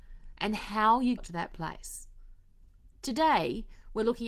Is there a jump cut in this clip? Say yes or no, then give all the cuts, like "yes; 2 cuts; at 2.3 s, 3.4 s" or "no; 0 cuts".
yes; 1 cut; at 1.2 s